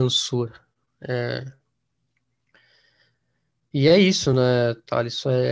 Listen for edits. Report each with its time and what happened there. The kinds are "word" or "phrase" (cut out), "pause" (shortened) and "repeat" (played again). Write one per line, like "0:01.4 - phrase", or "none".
none